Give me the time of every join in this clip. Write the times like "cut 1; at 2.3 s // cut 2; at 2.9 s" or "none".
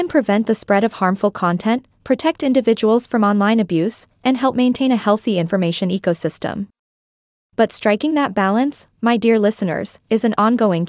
none